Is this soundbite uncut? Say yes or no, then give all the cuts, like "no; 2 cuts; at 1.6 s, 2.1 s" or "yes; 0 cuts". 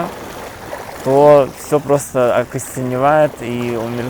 yes; 0 cuts